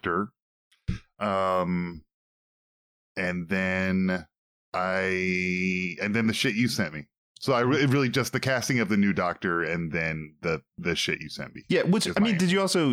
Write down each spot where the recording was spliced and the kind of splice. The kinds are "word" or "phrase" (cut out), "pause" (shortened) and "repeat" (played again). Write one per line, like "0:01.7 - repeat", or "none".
none